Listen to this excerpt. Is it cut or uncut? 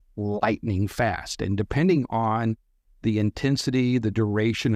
uncut